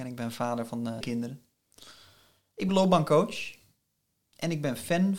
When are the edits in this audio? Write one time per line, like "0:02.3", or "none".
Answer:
0:01.0
0:02.7